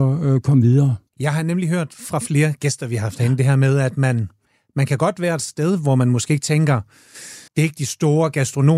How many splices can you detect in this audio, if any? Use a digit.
2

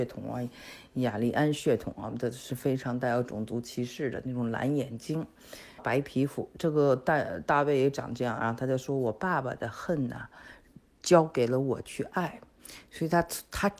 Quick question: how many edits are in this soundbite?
1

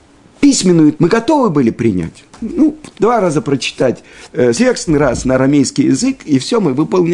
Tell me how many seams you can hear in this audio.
4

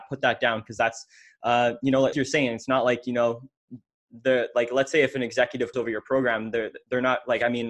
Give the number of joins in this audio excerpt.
2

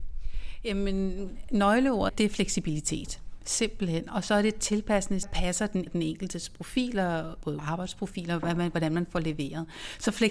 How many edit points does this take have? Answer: 4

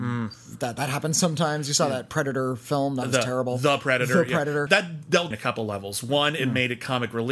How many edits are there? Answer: 2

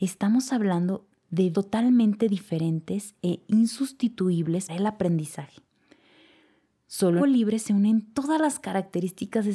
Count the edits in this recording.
3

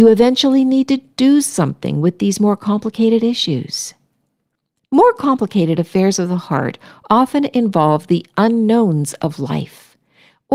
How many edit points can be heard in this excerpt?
0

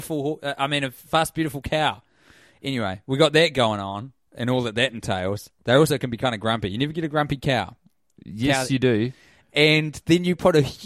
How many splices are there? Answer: 1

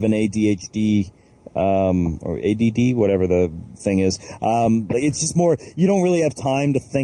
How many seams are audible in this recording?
0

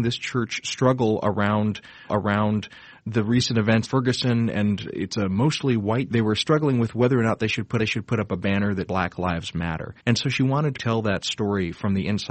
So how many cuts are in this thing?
7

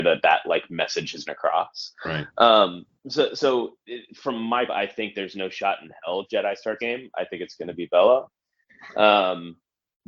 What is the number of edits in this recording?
4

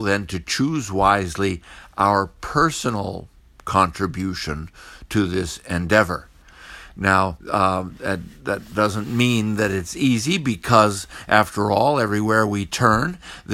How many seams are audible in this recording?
1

